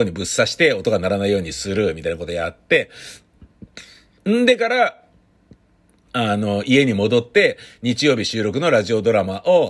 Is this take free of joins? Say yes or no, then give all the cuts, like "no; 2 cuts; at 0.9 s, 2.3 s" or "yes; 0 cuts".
yes; 0 cuts